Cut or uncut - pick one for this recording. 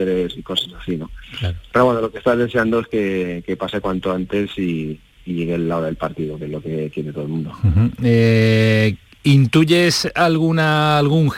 uncut